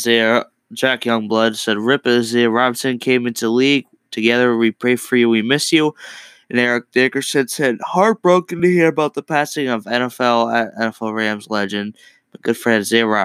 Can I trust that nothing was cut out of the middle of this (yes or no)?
yes